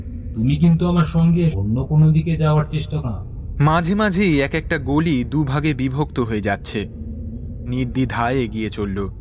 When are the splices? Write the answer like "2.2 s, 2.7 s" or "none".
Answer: 1.5 s, 3.0 s, 7.7 s